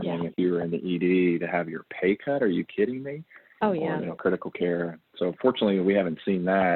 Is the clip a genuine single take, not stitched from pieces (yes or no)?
yes